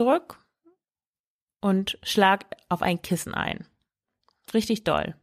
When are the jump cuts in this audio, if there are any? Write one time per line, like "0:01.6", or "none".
none